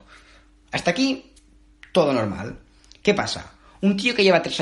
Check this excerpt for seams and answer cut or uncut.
uncut